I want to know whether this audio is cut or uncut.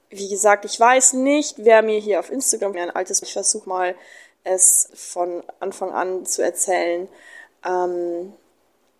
cut